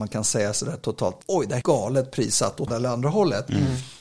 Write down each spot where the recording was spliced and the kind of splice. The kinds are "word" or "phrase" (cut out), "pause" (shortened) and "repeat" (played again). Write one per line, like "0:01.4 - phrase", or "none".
0:01.2 - pause
0:01.6 - word
0:02.7 - word

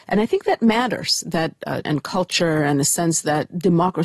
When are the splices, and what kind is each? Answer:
0:01.9 - word

